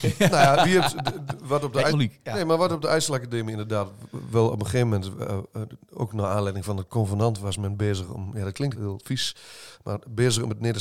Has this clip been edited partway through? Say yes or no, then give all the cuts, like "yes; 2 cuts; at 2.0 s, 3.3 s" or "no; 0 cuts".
yes; 2 cuts; at 1.9 s, 8.7 s